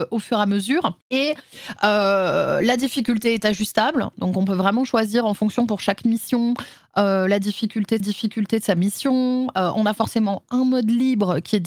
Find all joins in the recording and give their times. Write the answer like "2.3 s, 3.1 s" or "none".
1.0 s, 8.0 s